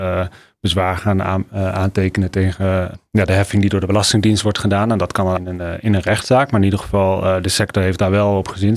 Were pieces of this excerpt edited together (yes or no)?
yes